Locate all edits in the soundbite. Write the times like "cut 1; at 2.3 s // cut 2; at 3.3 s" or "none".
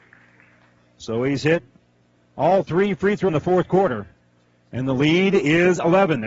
cut 1; at 3.3 s